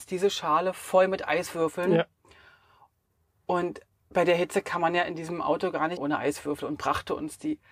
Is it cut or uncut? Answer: cut